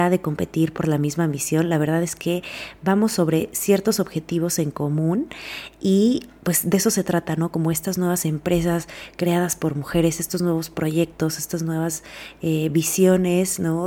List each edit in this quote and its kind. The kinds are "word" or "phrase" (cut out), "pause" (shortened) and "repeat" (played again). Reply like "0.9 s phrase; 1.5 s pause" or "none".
none

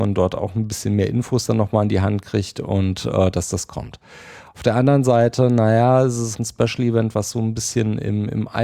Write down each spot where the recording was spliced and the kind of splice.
6.3 s word

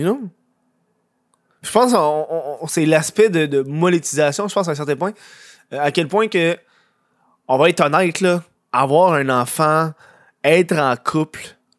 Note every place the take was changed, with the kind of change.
none

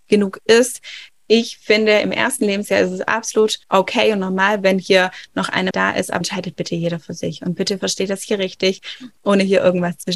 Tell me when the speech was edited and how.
3.6 s pause; 5.7 s word; 6.2 s word

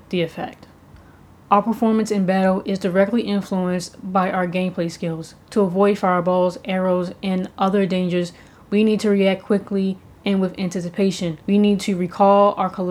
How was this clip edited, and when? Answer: 11.4 s pause

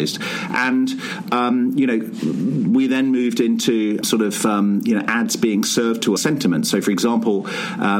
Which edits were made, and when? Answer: 4.0 s word; 6.2 s phrase

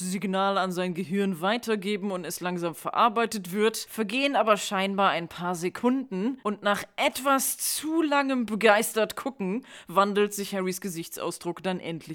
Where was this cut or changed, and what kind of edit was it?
none

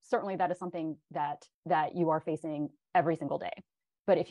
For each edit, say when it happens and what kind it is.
1.5 s pause

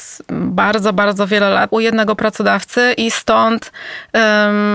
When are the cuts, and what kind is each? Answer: 1.7 s word

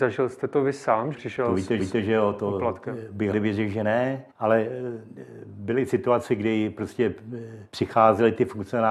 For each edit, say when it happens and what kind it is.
1.1 s phrase; 1.8 s repeat; 3.3 s word; 4.3 s pause; 7.7 s pause

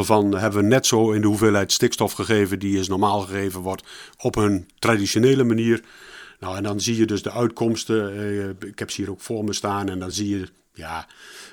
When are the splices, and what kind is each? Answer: none

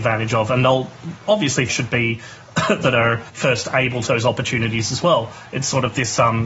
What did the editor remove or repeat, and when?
1.7 s phrase; 2.8 s word; 3.3 s pause; 4.1 s word

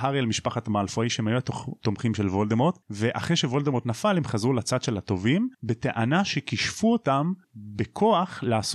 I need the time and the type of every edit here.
2.8 s pause; 5.5 s pause; 7.4 s pause

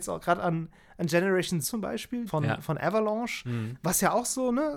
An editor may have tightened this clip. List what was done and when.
1.6 s word; 2.3 s word

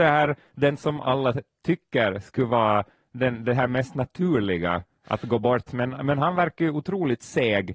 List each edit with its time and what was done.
none

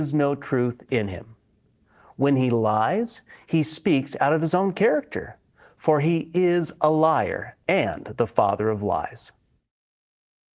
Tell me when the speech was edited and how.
none

